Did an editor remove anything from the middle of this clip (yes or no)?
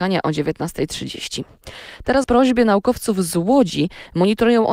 yes